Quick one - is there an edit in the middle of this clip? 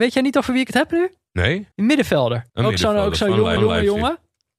yes; 3 cuts; at 1.7 s, 2.5 s, 3.6 s

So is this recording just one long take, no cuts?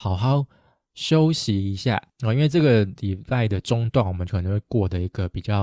no; 1 cut; at 2.1 s

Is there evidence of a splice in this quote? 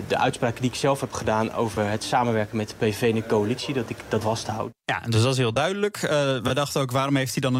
yes; 1 cut; at 4.2 s

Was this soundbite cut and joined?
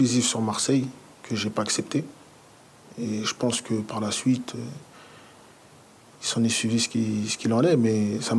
no; 0 cuts

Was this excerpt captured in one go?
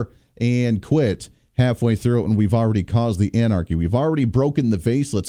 yes; 0 cuts

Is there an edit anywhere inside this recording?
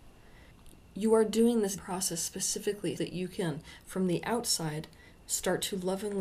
yes; 2 cuts; at 1.8 s, 3.0 s

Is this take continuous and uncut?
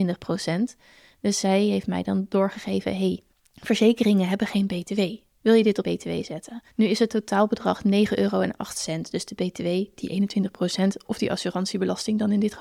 no; 3 cuts; at 3.3 s, 5.8 s, 6.7 s

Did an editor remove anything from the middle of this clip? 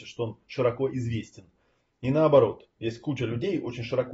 no; 0 cuts

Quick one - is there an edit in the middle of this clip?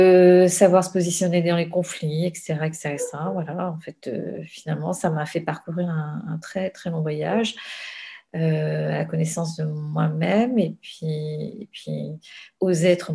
no; 0 cuts

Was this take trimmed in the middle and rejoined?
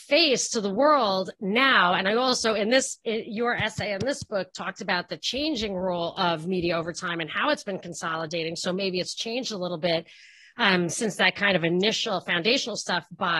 no; 0 cuts

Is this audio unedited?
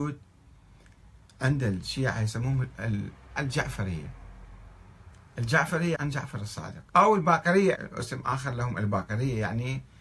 no; 4 cuts; at 3.4 s, 5.9 s, 6.9 s, 7.7 s

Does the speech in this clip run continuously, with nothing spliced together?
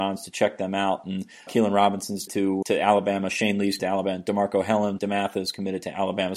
no; 5 cuts; at 1.5 s, 2.3 s, 2.6 s, 3.8 s, 5.0 s

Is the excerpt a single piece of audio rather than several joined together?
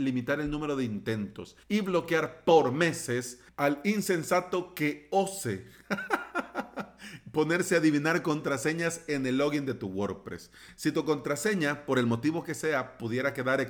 no; 1 cut; at 1.6 s

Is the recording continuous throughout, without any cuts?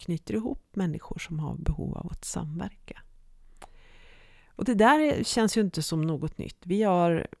yes; 0 cuts

